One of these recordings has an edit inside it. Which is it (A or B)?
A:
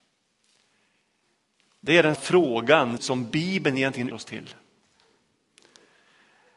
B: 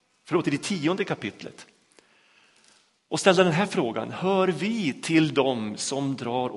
A